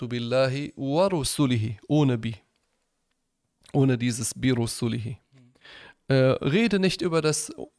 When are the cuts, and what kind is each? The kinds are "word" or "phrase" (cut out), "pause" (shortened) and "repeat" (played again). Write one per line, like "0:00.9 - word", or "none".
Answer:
none

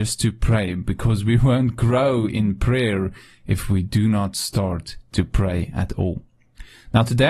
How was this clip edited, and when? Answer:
none

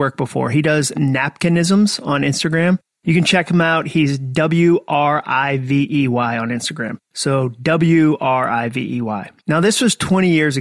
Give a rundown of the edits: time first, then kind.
0:07.0 - pause
0:09.4 - pause

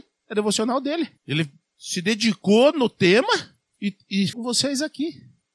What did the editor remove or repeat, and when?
0:01.2 - pause
0:03.6 - pause
0:04.3 - word

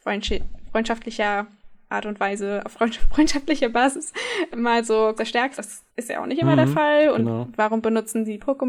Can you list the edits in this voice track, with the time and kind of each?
0:04.5 - word
0:05.2 - phrase
0:05.6 - word
0:05.9 - pause

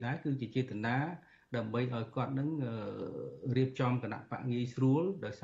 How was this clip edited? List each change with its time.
none

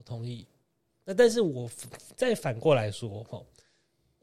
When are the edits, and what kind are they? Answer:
none

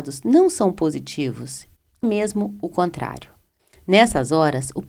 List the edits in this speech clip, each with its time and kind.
0:02.0 - word

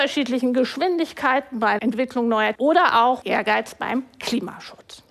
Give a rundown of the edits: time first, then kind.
0:01.8 - word
0:02.5 - word
0:03.2 - word

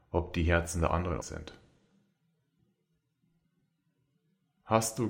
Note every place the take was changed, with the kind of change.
0:01.2 - word

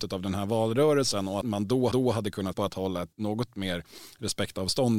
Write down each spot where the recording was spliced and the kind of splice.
0:01.4 - word
0:01.9 - repeat
0:02.5 - word
0:03.1 - pause

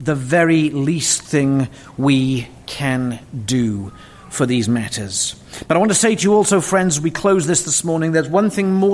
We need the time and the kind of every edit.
none

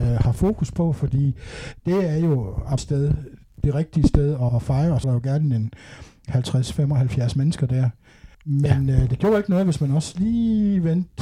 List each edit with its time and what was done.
0:02.8 - word
0:04.5 - word
0:05.0 - word
0:08.3 - pause

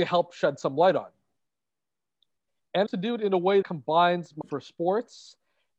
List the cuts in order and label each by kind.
0:02.9 - phrase
0:03.6 - word
0:04.4 - word

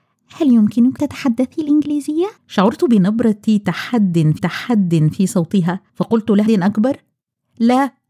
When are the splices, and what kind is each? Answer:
0:01.0 - word
0:02.4 - pause
0:04.4 - repeat
0:05.9 - pause
0:06.5 - word

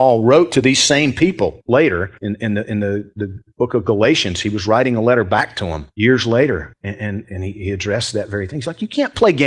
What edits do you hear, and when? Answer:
0:02.2 - pause
0:05.9 - pause

